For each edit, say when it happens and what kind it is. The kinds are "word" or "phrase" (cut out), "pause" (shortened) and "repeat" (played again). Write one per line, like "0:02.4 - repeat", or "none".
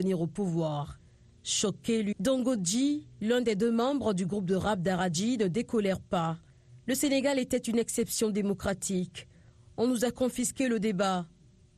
0:02.1 - word

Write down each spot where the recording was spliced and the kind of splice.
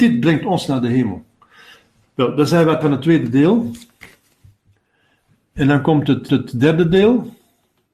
0:02.8 - word
0:06.3 - repeat

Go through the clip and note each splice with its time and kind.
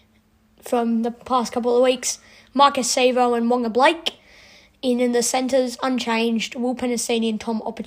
none

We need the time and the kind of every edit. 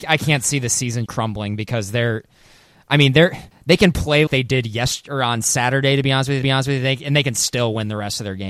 0:01.1 - word
0:03.5 - pause
0:04.3 - word
0:06.4 - repeat

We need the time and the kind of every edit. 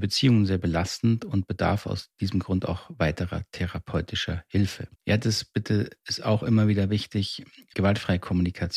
0:05.0 - pause

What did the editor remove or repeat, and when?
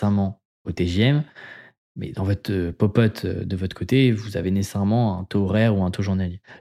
none

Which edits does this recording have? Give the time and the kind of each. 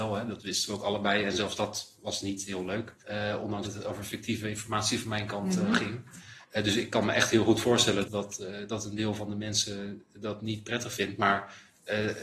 0:03.0 - pause
0:03.6 - word
0:06.4 - pause
0:08.0 - word

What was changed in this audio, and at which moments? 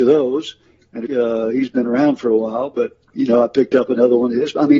0:01.1 - phrase
0:03.1 - word

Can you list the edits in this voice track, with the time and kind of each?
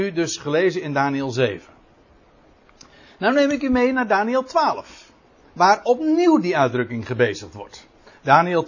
none

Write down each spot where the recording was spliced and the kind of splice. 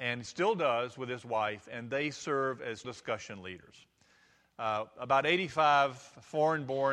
0:02.8 - word

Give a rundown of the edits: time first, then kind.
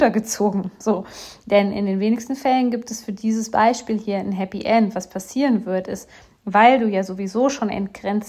none

